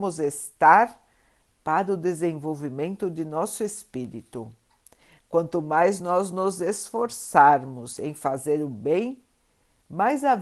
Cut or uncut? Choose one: uncut